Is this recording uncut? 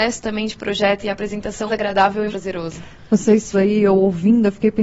no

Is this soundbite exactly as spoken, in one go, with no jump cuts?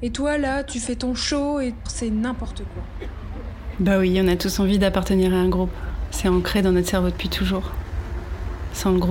no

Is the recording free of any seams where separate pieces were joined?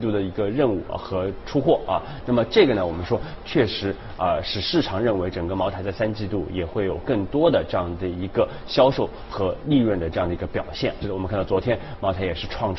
no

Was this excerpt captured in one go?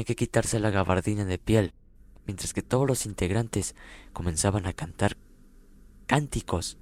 yes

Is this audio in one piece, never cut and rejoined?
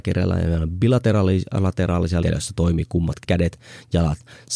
no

